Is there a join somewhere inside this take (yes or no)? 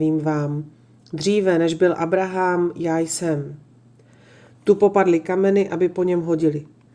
no